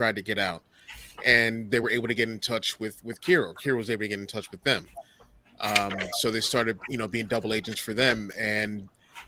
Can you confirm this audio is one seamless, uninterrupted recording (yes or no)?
yes